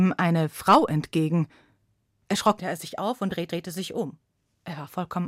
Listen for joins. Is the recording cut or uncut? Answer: cut